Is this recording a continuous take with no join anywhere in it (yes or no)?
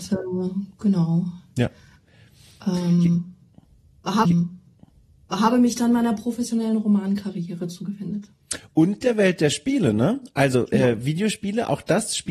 no